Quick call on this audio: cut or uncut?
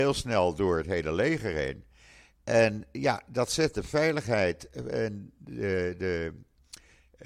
uncut